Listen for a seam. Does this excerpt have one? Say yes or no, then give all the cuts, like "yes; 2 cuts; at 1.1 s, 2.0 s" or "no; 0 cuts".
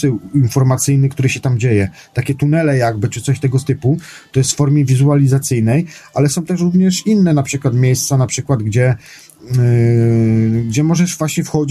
no; 0 cuts